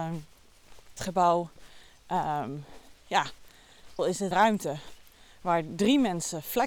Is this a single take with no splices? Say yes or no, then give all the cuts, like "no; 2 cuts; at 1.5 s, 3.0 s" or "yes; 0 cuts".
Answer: no; 3 cuts; at 1.0 s, 4.0 s, 4.3 s